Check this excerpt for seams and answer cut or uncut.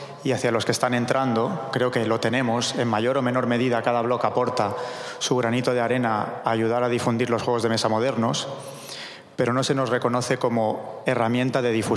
uncut